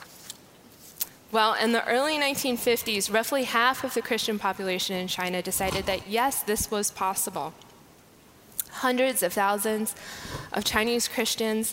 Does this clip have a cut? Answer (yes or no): no